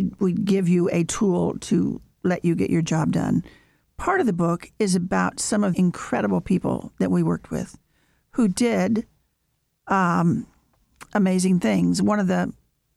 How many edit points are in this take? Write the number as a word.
one